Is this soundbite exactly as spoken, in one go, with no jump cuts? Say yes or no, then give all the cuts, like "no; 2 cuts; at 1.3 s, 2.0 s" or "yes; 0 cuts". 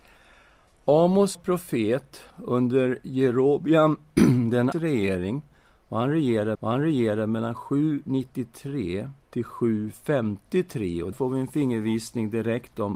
no; 6 cuts; at 1.3 s, 2.3 s, 4.7 s, 6.5 s, 9.2 s, 11.1 s